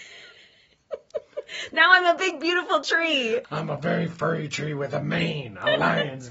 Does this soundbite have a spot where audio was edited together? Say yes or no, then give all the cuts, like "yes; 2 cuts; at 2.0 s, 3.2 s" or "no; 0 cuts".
no; 0 cuts